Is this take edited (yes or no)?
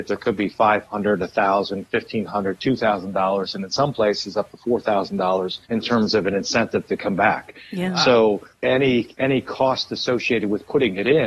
yes